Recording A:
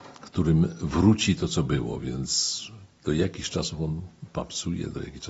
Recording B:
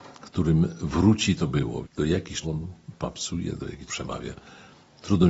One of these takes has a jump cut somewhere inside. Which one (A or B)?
B